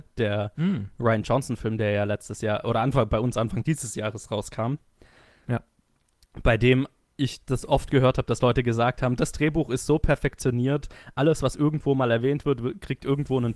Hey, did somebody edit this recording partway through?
no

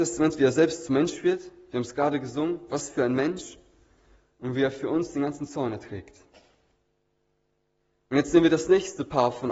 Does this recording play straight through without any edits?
yes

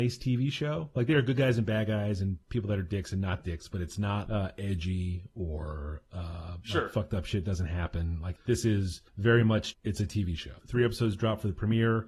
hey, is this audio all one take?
no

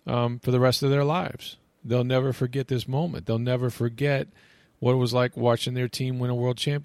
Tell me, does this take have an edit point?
no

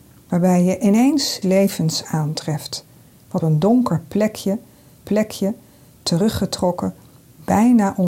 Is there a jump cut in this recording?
yes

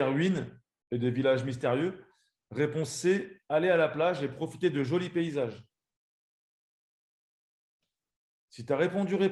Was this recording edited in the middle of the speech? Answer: no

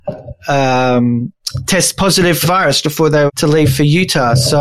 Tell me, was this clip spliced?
yes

